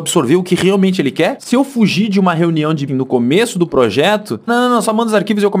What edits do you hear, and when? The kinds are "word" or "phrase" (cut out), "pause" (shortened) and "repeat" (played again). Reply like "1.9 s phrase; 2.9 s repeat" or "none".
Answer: 2.9 s word; 4.5 s word